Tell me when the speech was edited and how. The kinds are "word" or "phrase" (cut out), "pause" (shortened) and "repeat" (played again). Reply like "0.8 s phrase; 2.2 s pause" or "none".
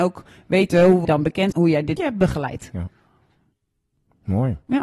1.0 s word; 1.5 s word; 2.0 s word